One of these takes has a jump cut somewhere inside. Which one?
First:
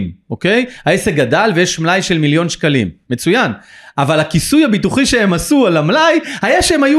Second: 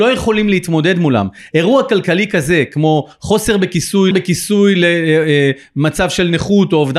second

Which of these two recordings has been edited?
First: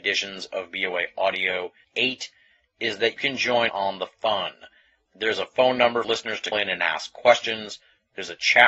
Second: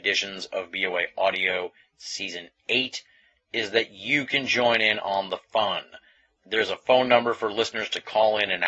first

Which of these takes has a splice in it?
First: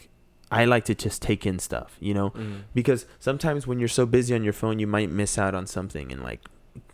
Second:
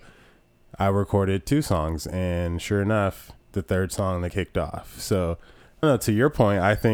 second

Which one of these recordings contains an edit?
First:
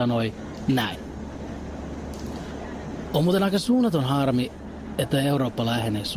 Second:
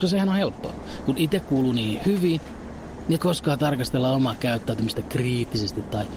second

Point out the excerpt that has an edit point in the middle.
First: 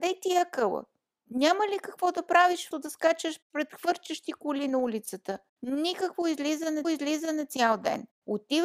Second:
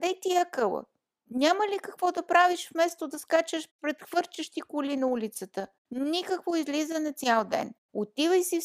first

